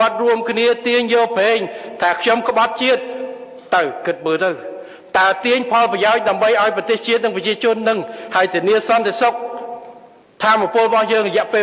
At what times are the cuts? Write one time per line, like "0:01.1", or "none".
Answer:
none